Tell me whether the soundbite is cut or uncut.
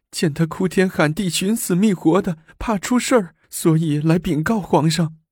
cut